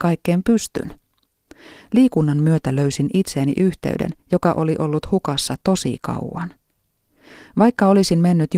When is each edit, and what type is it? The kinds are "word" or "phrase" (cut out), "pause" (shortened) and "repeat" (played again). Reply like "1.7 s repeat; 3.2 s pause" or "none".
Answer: none